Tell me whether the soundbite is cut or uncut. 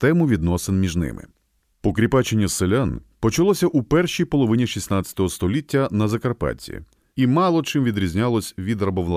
uncut